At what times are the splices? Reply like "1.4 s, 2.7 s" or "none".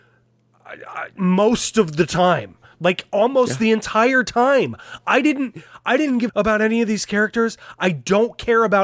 6.3 s